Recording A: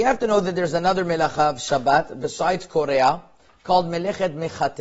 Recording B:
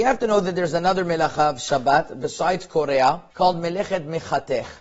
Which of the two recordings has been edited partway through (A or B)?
B